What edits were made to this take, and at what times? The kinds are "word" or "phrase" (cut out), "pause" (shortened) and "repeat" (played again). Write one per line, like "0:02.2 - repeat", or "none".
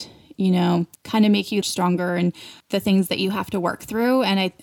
0:00.9 - word
0:01.6 - phrase
0:02.6 - pause